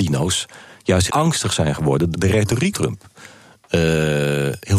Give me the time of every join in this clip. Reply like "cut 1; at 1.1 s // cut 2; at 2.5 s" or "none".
cut 1; at 1.1 s // cut 2; at 2.1 s // cut 3; at 2.7 s